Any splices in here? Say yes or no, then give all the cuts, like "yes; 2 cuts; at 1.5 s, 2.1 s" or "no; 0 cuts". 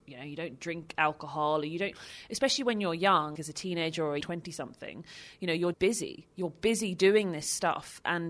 yes; 3 cuts; at 3.4 s, 4.2 s, 5.7 s